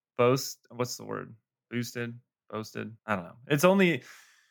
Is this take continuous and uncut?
no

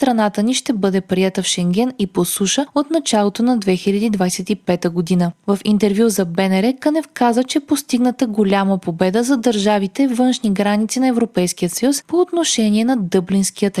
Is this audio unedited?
yes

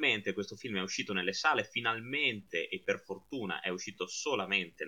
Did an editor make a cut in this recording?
no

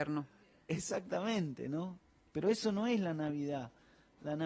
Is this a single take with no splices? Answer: yes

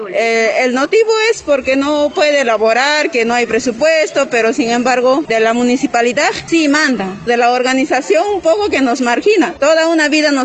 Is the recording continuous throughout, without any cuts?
no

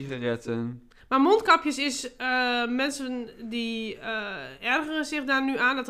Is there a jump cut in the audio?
no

